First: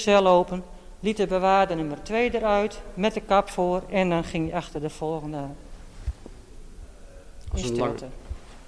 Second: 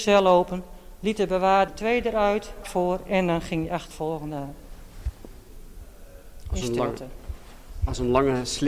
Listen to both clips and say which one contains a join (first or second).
second